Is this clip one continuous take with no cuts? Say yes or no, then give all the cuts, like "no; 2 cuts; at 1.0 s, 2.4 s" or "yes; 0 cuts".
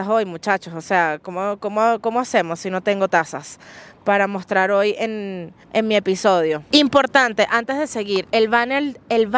no; 1 cut; at 5.6 s